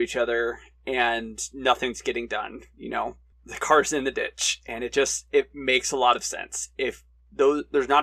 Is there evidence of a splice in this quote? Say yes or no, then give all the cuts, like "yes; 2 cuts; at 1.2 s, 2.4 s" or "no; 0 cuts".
no; 0 cuts